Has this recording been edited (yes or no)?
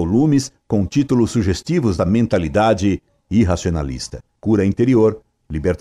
yes